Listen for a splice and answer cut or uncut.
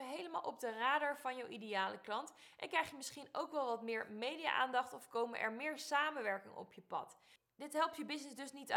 uncut